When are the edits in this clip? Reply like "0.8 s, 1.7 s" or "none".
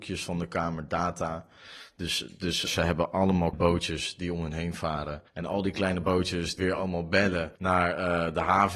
2.7 s, 3.5 s, 5.3 s, 6.6 s, 7.6 s